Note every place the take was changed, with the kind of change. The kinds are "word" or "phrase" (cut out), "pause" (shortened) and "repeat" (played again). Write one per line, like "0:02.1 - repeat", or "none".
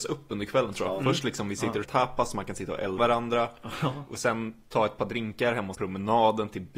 0:01.8 - word
0:03.0 - word
0:05.7 - word